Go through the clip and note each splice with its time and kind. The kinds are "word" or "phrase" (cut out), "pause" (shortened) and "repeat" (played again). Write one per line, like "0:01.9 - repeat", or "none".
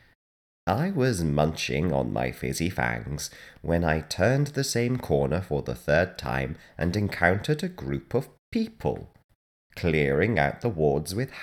none